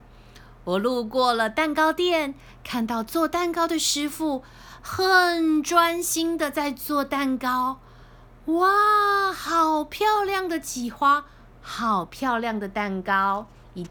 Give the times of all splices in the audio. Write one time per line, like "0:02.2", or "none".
none